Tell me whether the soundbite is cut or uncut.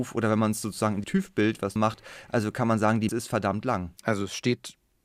cut